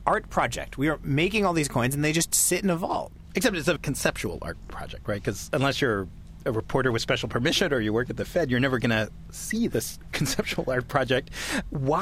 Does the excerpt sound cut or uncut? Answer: cut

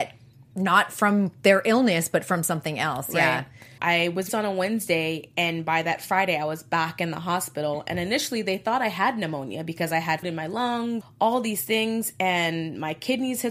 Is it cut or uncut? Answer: cut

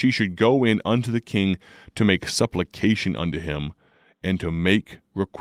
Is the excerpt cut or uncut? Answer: uncut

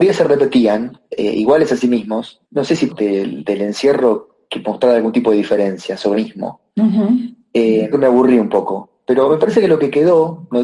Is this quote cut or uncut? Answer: cut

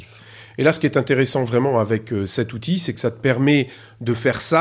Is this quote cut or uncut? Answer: uncut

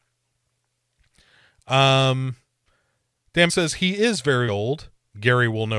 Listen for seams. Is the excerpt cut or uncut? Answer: cut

